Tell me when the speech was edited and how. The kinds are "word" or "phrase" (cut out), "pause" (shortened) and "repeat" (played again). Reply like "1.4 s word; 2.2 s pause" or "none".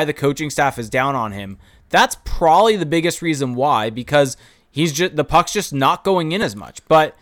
none